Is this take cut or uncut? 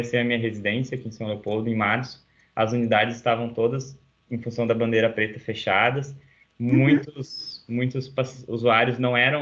uncut